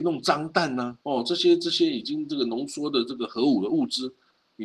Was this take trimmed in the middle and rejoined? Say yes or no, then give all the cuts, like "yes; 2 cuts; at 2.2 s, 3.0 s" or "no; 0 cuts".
yes; 1 cut; at 1.0 s